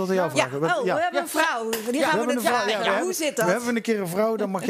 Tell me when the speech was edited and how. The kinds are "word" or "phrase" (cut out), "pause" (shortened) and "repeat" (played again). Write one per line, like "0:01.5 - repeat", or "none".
none

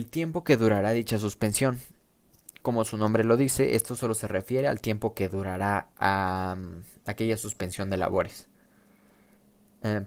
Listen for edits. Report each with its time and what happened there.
0:05.9 - pause

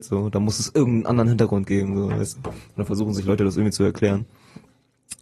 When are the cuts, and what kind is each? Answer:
none

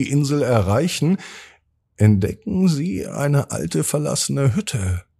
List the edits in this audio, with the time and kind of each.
none

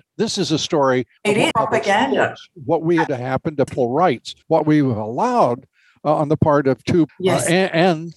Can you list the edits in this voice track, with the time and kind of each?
0:01.2 - pause
0:01.5 - phrase
0:03.1 - word
0:03.7 - word
0:04.4 - pause
0:07.1 - phrase

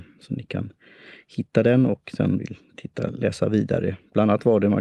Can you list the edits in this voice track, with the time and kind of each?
0:02.4 - phrase

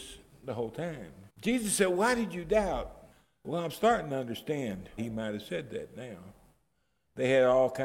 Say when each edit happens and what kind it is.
0:01.3 - pause
0:03.1 - pause
0:05.0 - word

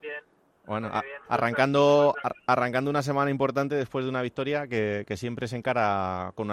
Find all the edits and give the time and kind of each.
0:01.2 - pause

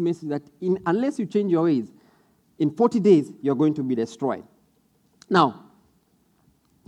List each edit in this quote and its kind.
none

